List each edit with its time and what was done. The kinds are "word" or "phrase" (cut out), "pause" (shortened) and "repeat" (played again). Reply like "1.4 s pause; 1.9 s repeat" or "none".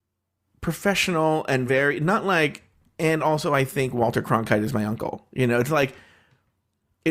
none